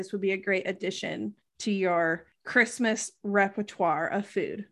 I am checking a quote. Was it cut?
no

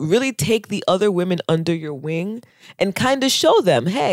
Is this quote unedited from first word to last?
yes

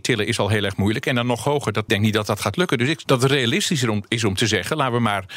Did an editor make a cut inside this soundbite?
yes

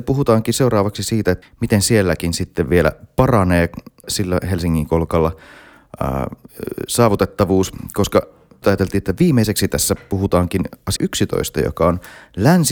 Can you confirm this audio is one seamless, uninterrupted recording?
no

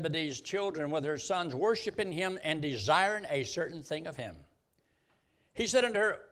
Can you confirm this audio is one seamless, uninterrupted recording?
yes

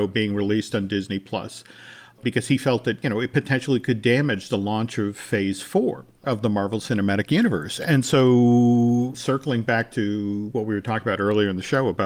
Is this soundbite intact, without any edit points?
yes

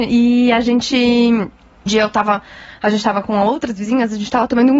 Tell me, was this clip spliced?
yes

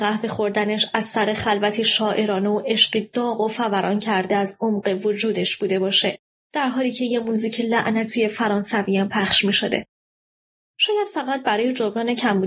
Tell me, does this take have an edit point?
no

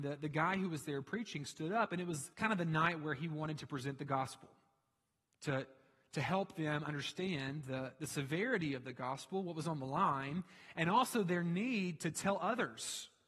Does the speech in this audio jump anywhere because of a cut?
yes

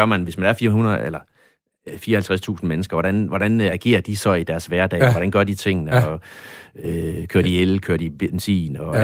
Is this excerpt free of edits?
yes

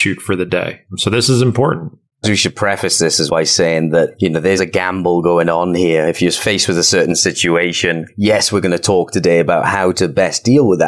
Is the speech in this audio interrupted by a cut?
yes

